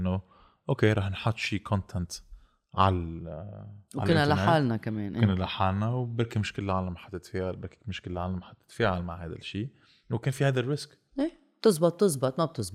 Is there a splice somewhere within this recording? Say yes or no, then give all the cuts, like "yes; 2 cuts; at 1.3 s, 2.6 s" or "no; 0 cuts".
no; 0 cuts